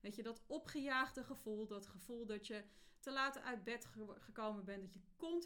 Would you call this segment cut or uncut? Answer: uncut